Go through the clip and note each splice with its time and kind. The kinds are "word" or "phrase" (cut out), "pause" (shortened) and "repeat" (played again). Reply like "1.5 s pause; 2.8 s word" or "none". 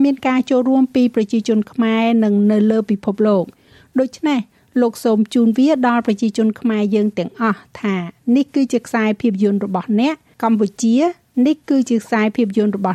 none